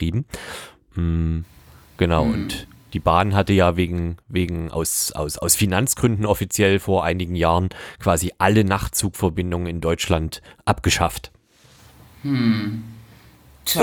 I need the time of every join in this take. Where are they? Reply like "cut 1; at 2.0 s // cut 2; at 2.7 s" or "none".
none